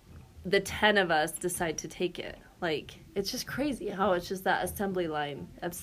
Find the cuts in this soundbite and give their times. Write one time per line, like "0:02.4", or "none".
none